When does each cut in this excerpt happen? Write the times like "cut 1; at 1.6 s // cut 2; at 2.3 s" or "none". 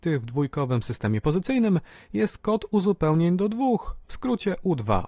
none

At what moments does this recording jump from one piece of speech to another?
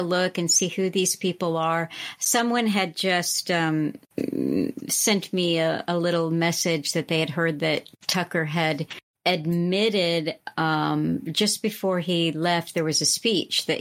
none

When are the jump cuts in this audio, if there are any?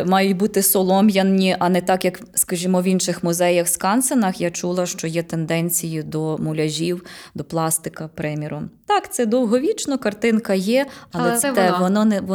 cut 1; at 11.4 s

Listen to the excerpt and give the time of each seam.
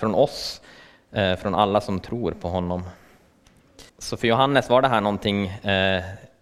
cut 1; at 3.9 s

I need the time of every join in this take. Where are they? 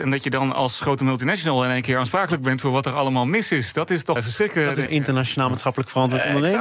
cut 1; at 4.2 s // cut 2; at 4.9 s

